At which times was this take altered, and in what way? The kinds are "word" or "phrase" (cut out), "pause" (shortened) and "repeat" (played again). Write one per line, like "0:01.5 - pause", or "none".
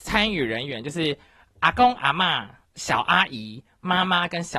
none